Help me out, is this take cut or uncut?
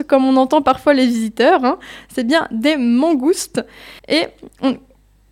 cut